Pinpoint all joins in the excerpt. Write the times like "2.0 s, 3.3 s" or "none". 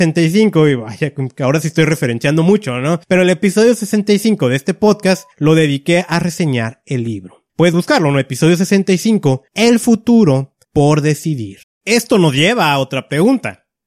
3.0 s, 5.3 s, 7.5 s, 9.5 s, 10.6 s, 11.6 s